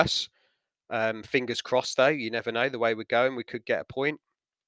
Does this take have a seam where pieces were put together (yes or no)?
no